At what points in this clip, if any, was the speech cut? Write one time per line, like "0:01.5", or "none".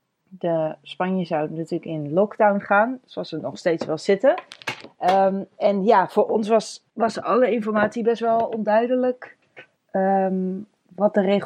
0:06.9
0:09.8